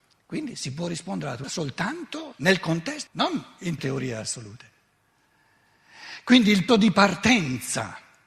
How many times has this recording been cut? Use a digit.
4